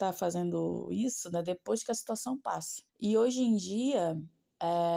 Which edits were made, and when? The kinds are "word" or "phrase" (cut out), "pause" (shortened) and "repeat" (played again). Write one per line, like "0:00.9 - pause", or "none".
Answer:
0:02.9 - pause